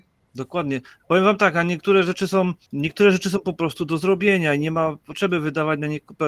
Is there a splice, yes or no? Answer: yes